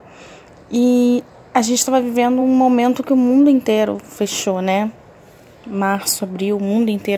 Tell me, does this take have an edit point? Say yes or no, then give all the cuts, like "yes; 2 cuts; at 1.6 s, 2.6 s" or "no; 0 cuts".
no; 0 cuts